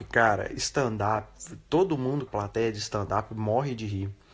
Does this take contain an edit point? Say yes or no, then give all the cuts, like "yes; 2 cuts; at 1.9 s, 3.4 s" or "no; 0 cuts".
yes; 1 cut; at 2.3 s